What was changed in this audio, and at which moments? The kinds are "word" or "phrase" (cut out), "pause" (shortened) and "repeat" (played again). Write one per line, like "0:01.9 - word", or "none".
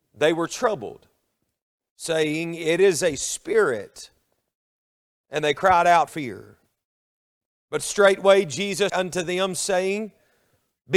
0:06.1 - word
0:08.9 - word